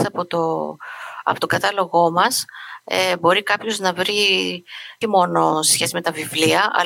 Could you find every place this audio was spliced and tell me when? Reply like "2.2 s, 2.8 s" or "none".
5.0 s